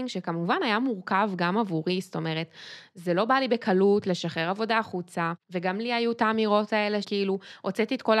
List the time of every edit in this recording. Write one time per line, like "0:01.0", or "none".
0:05.4
0:07.0

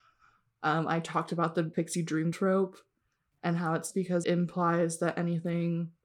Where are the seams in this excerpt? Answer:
0:01.7
0:02.3
0:03.9
0:04.2

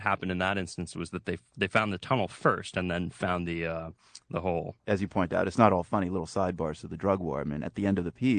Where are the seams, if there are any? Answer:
0:04.8

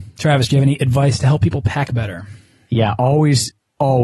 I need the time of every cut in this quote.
none

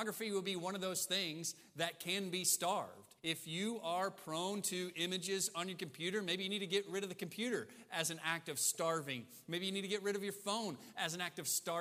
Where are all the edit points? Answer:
0:03.2

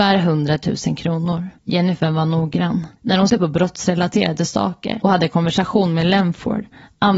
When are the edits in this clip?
0:01.6
0:03.0
0:03.3
0:05.0

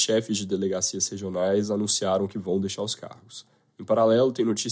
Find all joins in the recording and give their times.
none

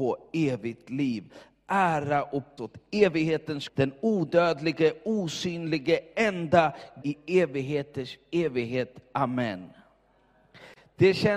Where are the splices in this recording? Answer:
0:02.6
0:03.7
0:07.0

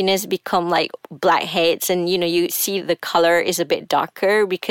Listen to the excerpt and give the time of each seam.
none

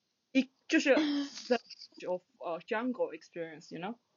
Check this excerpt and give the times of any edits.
0:02.0

